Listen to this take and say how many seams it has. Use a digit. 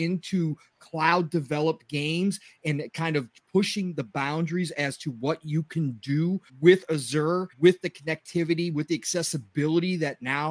2